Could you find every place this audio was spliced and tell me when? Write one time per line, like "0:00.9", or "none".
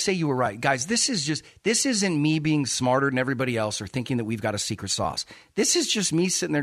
none